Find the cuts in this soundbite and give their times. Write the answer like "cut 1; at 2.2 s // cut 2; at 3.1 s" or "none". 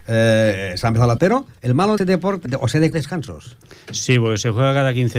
cut 1; at 1.2 s // cut 2; at 1.6 s // cut 3; at 2.0 s // cut 4; at 2.5 s // cut 5; at 2.9 s